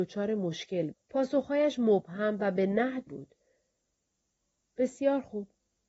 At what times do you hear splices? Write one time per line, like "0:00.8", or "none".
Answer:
0:00.9
0:03.1